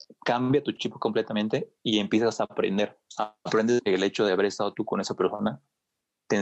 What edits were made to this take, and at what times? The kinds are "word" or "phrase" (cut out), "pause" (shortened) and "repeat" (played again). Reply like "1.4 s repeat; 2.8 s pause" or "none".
3.1 s pause

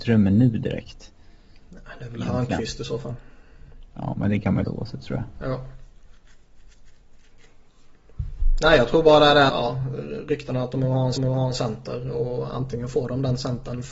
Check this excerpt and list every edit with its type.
4.7 s word; 9.5 s word; 11.2 s repeat

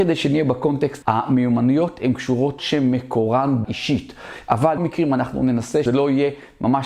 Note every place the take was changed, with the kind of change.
1.0 s word; 2.6 s word; 3.6 s word; 4.8 s word; 5.9 s word

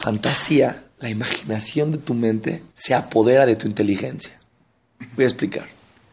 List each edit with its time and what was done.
0.9 s pause; 2.7 s pause

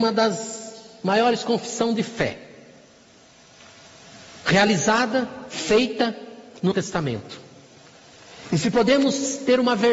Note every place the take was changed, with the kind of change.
6.7 s word

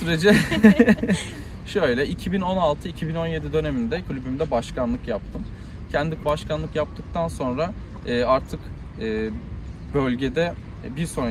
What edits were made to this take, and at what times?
4.0 s word; 6.2 s word

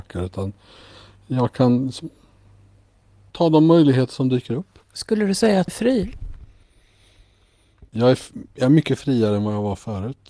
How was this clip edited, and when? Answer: 3.3 s word; 4.8 s pause; 5.7 s word; 7.9 s pause

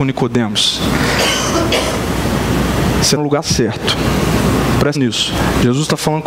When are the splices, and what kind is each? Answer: 3.2 s word; 4.9 s word

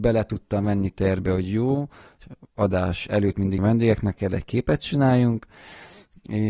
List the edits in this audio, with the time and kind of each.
3.6 s word; 4.2 s phrase

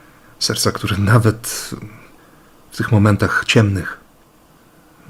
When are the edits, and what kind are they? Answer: none

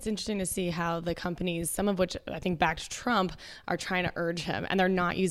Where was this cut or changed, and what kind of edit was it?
none

